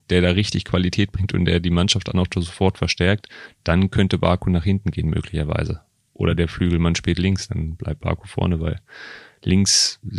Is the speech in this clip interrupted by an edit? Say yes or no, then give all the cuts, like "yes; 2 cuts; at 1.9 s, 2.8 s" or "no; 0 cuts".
no; 0 cuts